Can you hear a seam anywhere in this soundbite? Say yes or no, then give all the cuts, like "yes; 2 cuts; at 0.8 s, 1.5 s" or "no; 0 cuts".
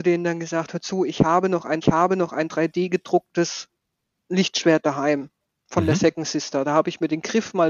yes; 2 cuts; at 1.8 s, 5.4 s